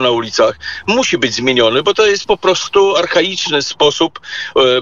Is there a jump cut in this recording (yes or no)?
no